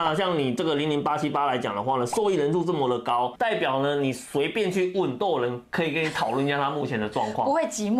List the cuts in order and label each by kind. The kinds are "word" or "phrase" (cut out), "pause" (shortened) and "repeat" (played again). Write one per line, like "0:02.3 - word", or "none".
0:03.4 - word